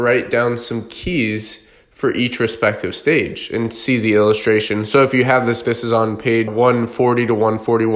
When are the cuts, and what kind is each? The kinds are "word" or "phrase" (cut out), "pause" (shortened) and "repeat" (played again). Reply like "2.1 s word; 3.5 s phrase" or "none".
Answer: 5.6 s word; 6.5 s word